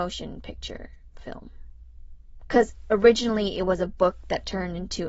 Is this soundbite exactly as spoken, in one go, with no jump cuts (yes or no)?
yes